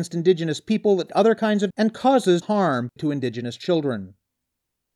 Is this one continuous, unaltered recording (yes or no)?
no